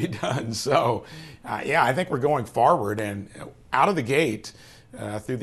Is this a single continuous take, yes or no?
yes